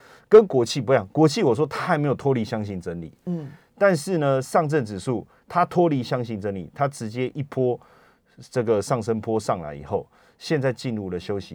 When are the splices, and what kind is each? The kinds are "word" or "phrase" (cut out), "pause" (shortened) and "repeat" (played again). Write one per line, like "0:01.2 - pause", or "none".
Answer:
none